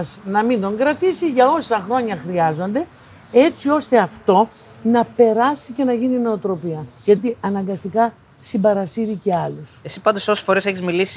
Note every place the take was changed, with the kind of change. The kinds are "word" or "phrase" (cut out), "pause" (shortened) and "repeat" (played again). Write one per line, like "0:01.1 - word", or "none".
0:07.2 - word